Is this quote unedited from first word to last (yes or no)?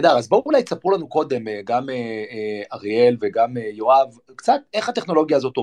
yes